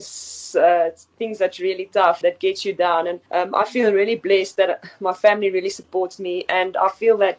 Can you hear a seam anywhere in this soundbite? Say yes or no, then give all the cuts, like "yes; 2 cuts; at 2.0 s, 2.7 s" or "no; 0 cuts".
yes; 2 cuts; at 2.2 s, 3.3 s